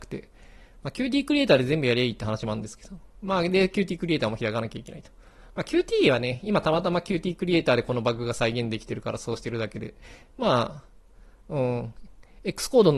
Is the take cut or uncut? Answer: uncut